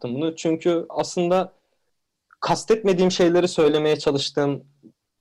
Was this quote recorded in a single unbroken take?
yes; 0 cuts

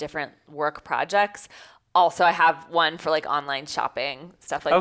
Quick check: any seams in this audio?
no; 0 cuts

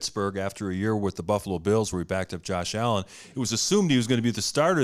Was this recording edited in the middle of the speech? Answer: no; 0 cuts

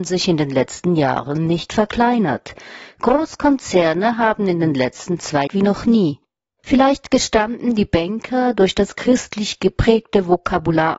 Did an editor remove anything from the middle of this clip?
yes; 1 cut; at 5.5 s

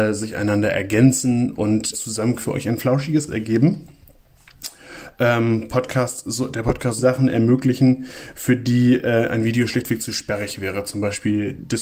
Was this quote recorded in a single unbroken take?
no; 4 cuts; at 1.9 s, 2.4 s, 3.3 s, 7.0 s

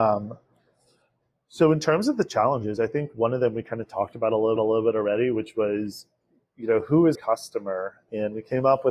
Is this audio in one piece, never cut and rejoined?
no; 2 cuts; at 4.6 s, 7.1 s

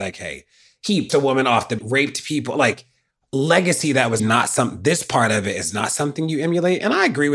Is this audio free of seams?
no; 3 cuts; at 1.1 s, 1.8 s, 4.2 s

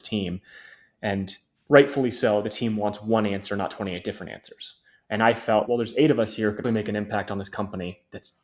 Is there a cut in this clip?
yes; 3 cuts; at 1.6 s, 5.6 s, 6.6 s

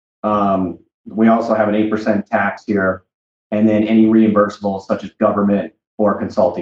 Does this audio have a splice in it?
no; 0 cuts

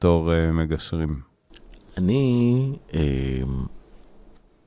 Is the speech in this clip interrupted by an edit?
no; 0 cuts

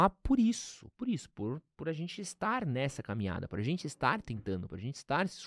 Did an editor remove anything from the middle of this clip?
no; 0 cuts

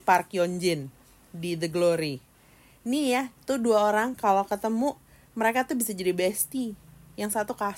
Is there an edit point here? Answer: no; 0 cuts

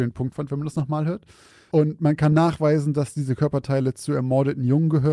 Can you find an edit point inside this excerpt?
no; 0 cuts

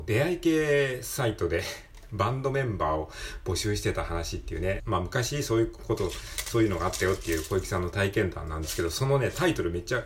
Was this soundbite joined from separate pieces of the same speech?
yes; 1 cut; at 4.8 s

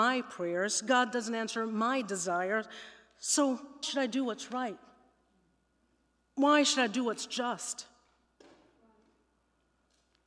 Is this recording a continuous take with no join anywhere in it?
no; 1 cut; at 3.8 s

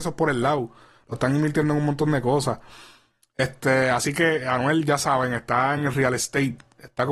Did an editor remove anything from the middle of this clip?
no; 0 cuts

